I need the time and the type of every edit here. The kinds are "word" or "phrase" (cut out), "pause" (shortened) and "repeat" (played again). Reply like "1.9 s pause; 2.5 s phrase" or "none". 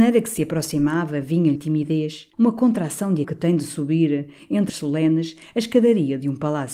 1.6 s word; 2.3 s pause; 3.2 s phrase; 4.7 s word